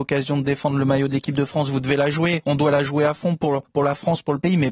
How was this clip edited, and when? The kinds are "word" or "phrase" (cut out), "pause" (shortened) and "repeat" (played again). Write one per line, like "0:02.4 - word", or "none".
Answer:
none